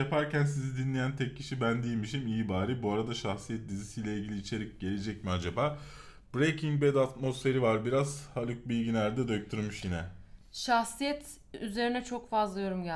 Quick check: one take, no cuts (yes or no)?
yes